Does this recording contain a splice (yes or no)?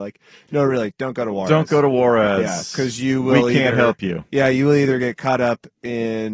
no